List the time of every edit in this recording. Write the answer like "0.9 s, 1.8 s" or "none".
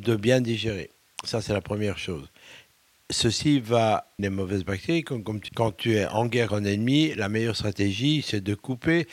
4.2 s, 5.5 s, 6.5 s

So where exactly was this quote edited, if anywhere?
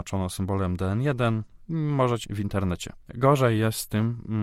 2.2 s

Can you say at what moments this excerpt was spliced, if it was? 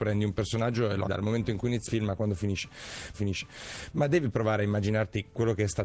1.1 s, 1.9 s, 3.1 s

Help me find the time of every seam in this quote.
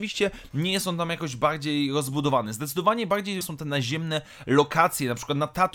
3.4 s

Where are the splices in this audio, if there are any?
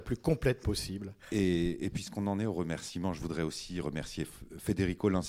none

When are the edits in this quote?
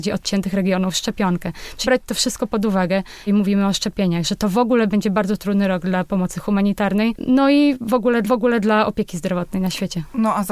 1.8 s, 3.3 s, 8.2 s

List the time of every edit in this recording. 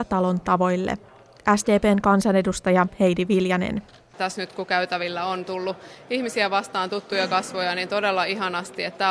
none

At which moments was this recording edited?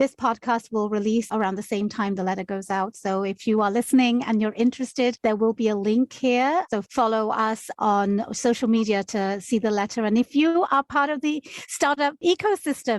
none

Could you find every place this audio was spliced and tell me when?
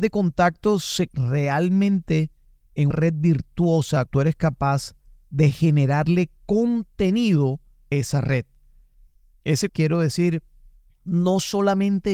1.1 s, 2.9 s, 4.1 s, 7.9 s, 9.7 s

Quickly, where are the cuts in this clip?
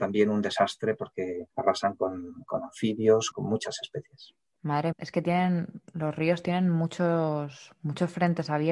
1.5 s, 3.3 s, 4.9 s

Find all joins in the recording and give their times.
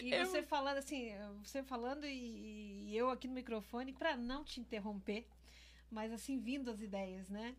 3.9 s

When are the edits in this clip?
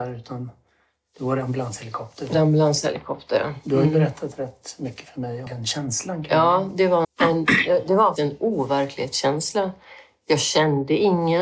2.3 s, 5.5 s, 7.0 s, 8.2 s

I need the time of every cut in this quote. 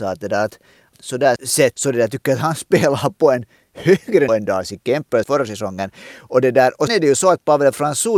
1.4 s, 1.7 s, 4.3 s, 5.2 s, 6.9 s

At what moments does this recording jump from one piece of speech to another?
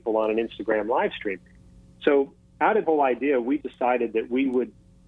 2.8 s, 3.6 s

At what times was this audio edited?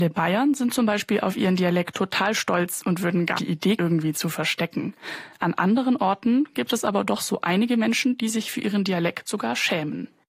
3.4 s, 3.8 s

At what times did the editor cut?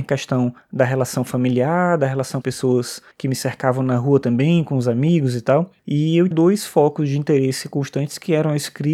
2.4 s, 3.1 s, 5.8 s, 6.3 s

